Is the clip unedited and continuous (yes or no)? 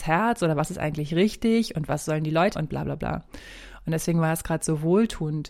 no